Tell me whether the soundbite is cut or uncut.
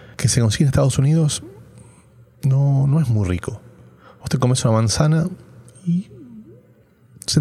uncut